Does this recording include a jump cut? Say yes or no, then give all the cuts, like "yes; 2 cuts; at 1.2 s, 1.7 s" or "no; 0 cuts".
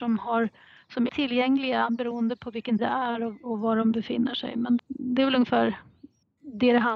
yes; 3 cuts; at 1.1 s, 2.8 s, 4.8 s